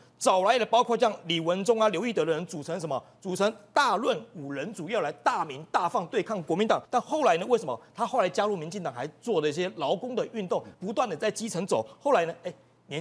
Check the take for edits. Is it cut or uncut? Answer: cut